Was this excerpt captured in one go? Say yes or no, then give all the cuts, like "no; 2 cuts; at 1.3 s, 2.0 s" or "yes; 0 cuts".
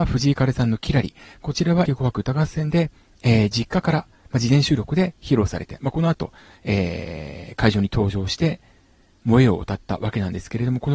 no; 1 cut; at 1.9 s